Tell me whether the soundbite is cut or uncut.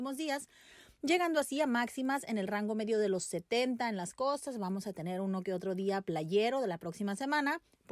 uncut